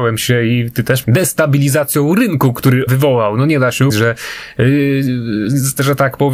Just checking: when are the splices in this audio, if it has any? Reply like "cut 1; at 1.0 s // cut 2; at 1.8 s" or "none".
cut 1; at 1.0 s // cut 2; at 2.9 s // cut 3; at 3.9 s